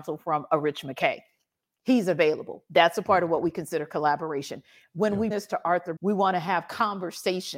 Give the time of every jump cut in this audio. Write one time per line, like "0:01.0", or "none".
0:05.3
0:06.0